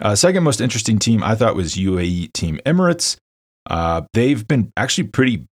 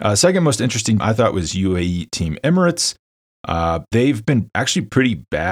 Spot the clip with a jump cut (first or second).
second